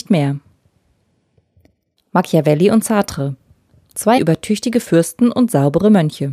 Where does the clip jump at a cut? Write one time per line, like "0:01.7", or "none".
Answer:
0:04.2